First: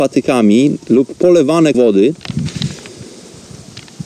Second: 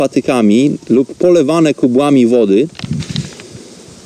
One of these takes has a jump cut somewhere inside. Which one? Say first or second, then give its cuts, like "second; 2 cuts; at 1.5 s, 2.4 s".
first; 1 cut; at 1.7 s